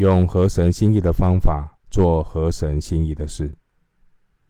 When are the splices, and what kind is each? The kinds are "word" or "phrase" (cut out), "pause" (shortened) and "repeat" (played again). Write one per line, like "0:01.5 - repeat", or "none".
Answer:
0:01.8 - pause